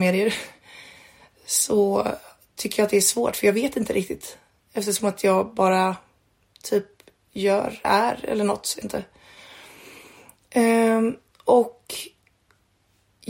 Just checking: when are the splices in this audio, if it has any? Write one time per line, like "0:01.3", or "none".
0:07.8
0:08.8